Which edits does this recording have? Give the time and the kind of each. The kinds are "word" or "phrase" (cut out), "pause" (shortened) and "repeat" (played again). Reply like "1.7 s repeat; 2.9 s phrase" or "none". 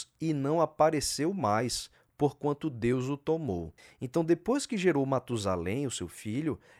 3.8 s pause